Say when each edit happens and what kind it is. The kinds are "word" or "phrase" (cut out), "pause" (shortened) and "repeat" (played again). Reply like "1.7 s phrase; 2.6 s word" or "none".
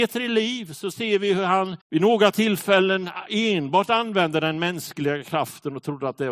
1.8 s pause